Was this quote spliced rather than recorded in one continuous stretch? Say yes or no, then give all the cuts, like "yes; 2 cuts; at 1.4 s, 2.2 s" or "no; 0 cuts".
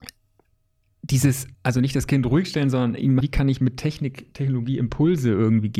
yes; 2 cuts; at 1.5 s, 3.2 s